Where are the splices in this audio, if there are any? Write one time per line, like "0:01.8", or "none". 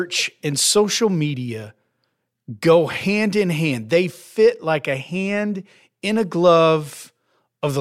none